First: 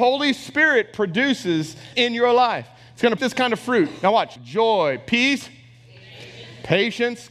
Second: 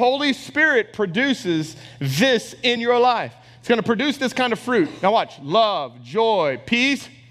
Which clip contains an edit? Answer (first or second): first